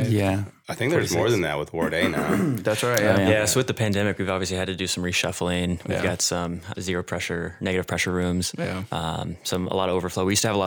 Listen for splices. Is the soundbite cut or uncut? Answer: cut